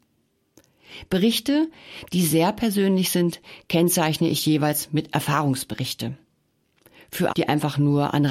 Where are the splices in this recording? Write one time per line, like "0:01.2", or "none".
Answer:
0:07.3